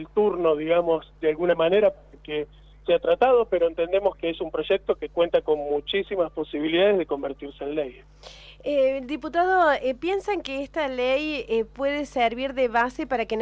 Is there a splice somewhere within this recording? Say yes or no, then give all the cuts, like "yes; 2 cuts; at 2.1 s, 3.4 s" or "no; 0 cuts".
no; 0 cuts